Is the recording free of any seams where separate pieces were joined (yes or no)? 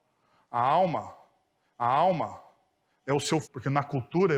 no